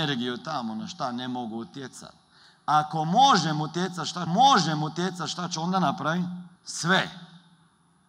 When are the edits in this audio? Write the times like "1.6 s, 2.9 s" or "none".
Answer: 4.3 s, 6.6 s